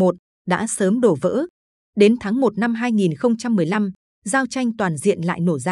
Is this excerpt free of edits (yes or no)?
yes